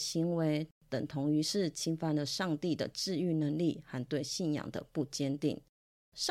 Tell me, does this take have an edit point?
no; 0 cuts

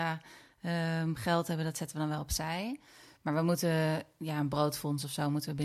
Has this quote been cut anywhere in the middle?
no; 0 cuts

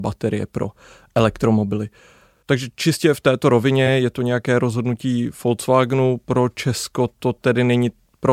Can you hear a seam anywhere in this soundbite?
no; 0 cuts

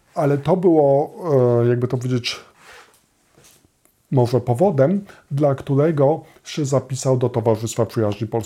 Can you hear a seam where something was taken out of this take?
no; 0 cuts

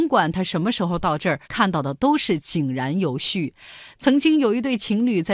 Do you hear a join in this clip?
yes; 1 cut; at 1.4 s

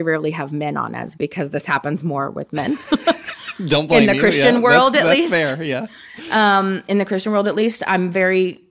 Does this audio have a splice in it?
yes; 1 cut; at 1.2 s

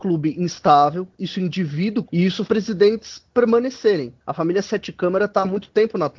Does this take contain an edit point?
yes; 4 cuts; at 1.1 s, 2.1 s, 2.4 s, 4.2 s

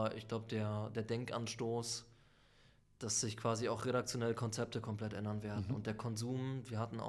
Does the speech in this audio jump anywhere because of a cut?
no; 0 cuts

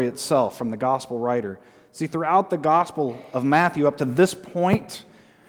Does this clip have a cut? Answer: no; 0 cuts

